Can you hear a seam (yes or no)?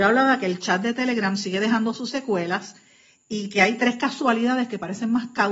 no